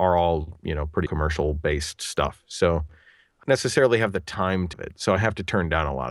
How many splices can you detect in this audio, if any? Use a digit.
3